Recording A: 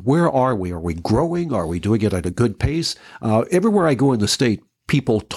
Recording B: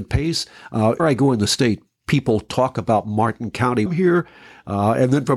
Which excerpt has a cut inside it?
B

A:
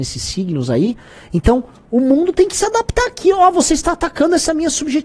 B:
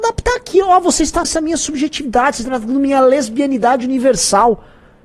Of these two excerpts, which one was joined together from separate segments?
B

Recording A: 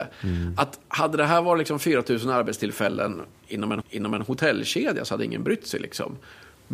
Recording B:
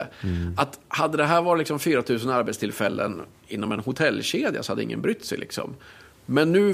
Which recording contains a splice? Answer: A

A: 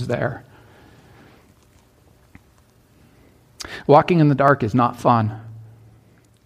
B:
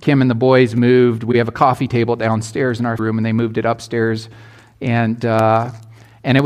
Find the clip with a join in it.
B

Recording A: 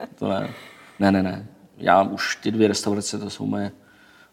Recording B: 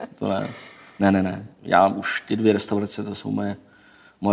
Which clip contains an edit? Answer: B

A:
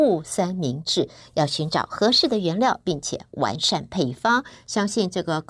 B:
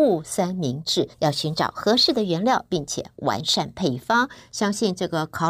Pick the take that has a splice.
B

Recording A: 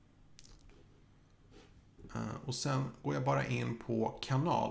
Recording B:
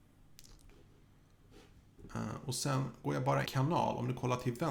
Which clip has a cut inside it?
B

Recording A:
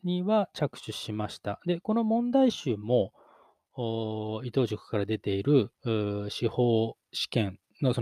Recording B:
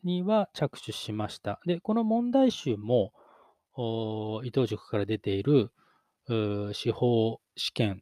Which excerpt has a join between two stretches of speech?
A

